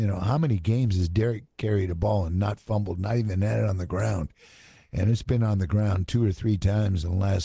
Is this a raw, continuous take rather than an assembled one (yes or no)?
yes